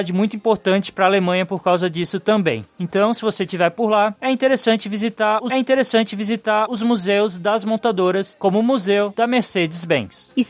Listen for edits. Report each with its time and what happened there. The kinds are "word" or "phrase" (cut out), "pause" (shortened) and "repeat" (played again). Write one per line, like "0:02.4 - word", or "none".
0:05.5 - repeat